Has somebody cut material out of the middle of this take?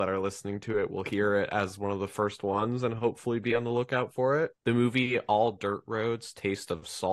yes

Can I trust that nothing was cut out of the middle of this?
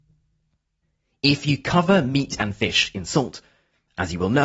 yes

